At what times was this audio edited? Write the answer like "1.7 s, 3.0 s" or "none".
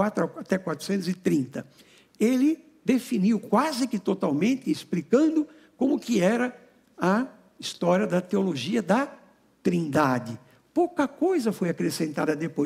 none